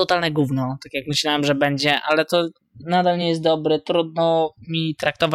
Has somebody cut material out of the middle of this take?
no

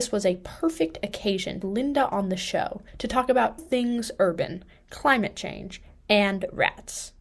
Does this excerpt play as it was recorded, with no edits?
no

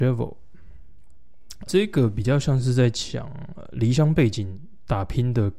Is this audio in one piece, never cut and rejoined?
no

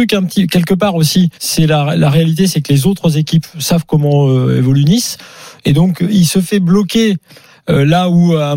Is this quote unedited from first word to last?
no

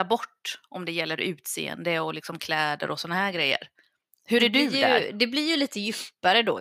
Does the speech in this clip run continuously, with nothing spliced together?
yes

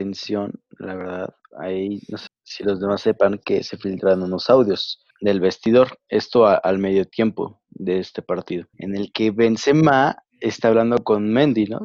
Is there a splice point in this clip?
yes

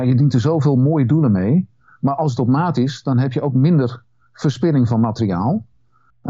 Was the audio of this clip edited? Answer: no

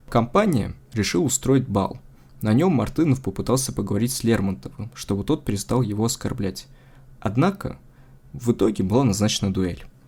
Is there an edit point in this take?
no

